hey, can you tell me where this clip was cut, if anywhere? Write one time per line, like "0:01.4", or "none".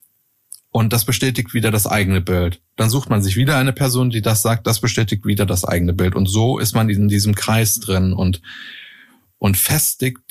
none